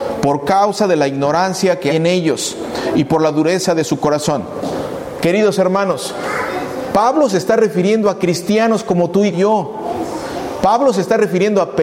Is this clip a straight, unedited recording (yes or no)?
no